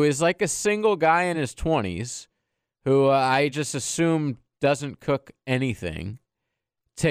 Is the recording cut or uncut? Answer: uncut